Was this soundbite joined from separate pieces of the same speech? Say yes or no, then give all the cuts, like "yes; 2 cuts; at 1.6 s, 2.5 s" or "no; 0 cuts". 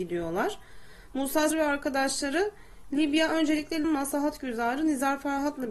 yes; 2 cuts; at 1.5 s, 3.8 s